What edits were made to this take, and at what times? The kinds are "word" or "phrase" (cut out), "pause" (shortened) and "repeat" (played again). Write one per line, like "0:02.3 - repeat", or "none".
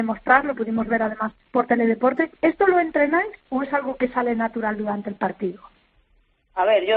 0:01.4 - pause
0:02.3 - pause
0:03.4 - pause